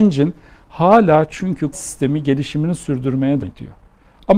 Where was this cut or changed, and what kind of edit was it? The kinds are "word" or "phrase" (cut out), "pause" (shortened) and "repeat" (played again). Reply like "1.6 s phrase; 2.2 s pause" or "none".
1.7 s word; 3.4 s word